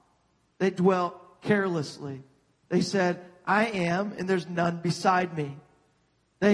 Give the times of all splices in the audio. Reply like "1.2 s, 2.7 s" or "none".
none